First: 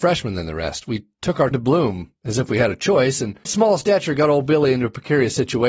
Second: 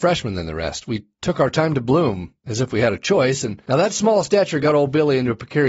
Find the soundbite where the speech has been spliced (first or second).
first